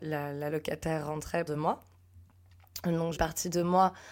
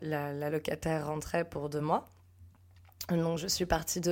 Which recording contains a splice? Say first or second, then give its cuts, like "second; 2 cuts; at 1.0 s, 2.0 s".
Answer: first; 2 cuts; at 1.5 s, 3.2 s